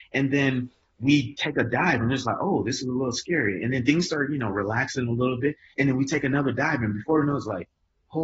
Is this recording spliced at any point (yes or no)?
no